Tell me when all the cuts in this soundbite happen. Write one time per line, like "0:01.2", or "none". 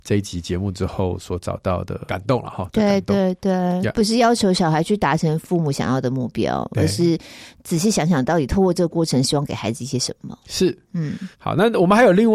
0:10.4
0:11.3